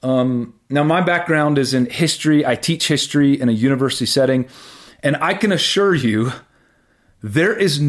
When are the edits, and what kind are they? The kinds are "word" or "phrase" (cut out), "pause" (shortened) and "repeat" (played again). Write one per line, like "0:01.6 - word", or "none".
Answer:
none